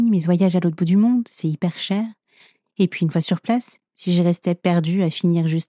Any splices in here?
no; 0 cuts

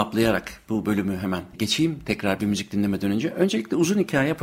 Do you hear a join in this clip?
yes; 1 cut; at 1.5 s

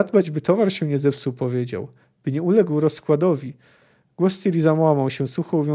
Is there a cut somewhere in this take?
no; 0 cuts

